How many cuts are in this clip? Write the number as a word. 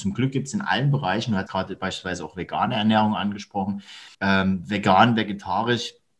two